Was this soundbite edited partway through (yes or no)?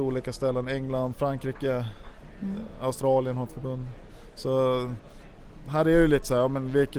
no